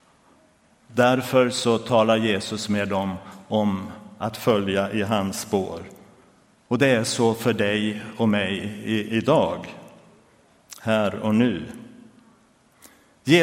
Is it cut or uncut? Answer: uncut